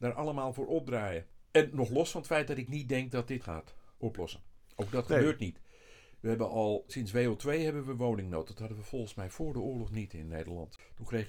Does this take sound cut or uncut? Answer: cut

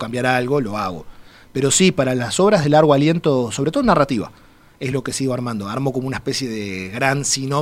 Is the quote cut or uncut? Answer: uncut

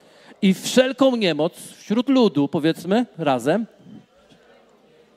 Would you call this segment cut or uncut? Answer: uncut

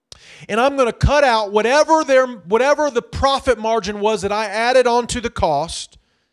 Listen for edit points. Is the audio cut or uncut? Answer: uncut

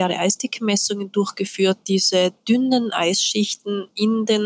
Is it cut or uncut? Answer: uncut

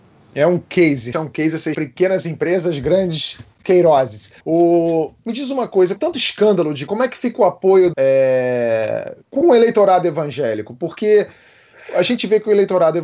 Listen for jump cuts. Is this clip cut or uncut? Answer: cut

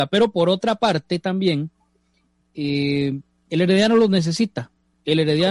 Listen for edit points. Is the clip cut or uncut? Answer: uncut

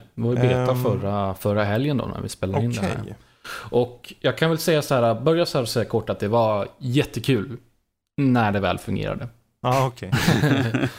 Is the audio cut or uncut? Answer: uncut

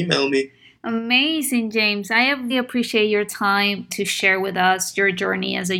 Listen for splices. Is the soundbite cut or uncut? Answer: cut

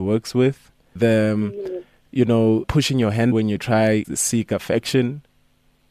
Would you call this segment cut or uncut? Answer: cut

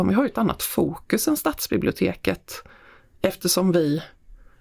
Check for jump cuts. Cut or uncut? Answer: uncut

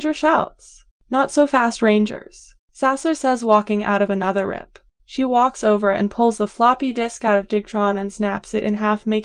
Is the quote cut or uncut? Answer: uncut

